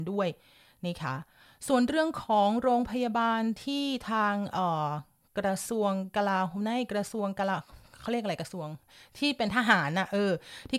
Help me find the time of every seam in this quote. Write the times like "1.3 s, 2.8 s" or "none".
none